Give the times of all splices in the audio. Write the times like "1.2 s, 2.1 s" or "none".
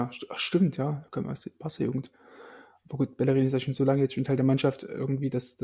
none